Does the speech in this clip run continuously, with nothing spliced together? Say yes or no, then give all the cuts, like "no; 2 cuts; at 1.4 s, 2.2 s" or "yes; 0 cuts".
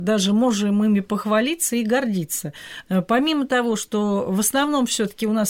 yes; 0 cuts